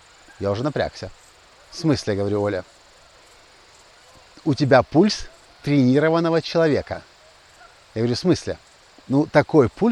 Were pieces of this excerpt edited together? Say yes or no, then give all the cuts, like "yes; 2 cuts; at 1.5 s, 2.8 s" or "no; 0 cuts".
no; 0 cuts